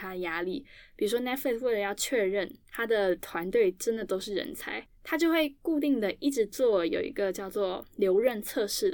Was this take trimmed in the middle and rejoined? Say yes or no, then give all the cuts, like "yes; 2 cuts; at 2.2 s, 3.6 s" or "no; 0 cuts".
yes; 1 cut; at 4.9 s